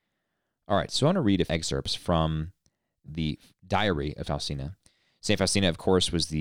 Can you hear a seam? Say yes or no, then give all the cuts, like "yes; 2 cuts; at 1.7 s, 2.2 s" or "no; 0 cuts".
yes; 3 cuts; at 1.5 s, 3.1 s, 4.2 s